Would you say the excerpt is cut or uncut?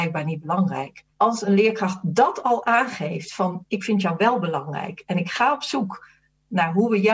cut